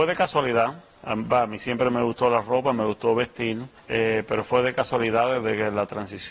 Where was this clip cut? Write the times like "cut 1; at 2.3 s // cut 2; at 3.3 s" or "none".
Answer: cut 1; at 3.8 s